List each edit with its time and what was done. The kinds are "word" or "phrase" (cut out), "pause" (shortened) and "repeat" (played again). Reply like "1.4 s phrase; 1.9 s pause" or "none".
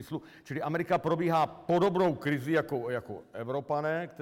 none